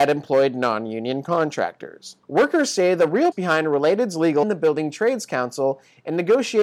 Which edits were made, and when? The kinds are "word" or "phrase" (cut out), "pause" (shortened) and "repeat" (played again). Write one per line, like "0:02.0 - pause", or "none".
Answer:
0:02.2 - pause
0:03.3 - word
0:04.4 - phrase